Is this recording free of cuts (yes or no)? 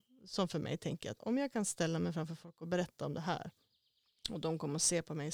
yes